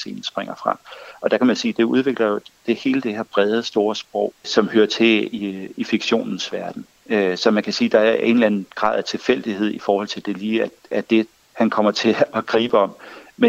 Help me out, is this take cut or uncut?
uncut